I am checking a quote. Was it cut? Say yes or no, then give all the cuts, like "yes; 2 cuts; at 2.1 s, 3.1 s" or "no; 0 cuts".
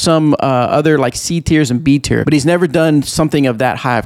yes; 1 cut; at 2.2 s